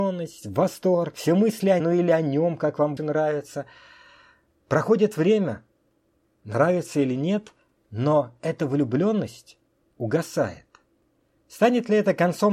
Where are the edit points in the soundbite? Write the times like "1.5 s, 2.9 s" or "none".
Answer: 1.8 s, 3.0 s